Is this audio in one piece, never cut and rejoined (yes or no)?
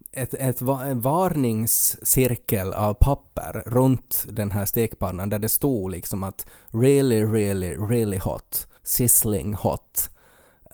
no